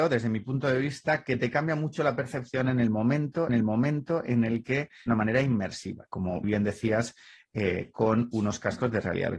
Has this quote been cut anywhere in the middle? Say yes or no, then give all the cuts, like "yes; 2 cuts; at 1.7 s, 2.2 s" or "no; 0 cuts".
yes; 3 cuts; at 3.5 s, 5.1 s, 6.4 s